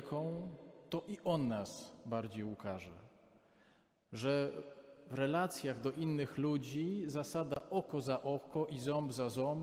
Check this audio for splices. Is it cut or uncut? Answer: uncut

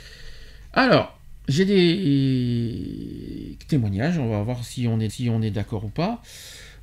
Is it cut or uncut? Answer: cut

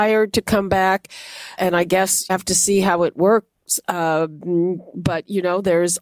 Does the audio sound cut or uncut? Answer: cut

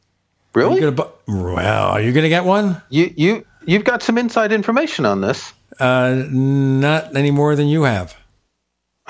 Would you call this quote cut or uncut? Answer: uncut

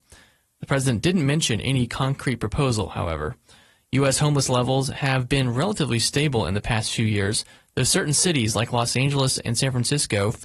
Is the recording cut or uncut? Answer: uncut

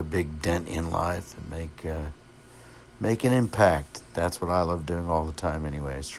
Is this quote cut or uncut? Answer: uncut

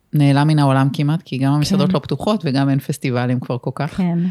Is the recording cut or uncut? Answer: uncut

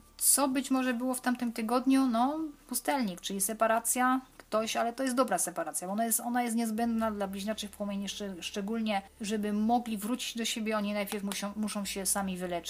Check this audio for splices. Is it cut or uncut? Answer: uncut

